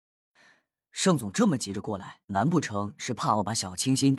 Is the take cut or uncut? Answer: cut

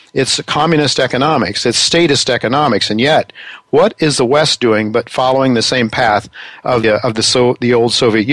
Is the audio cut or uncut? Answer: cut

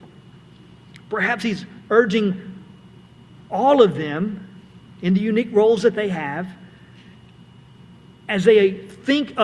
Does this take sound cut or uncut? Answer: uncut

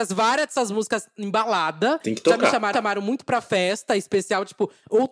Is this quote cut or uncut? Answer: cut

